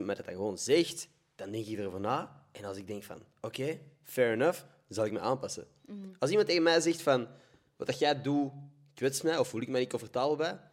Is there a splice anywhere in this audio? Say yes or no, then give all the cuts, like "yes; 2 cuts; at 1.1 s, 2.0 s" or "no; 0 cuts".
no; 0 cuts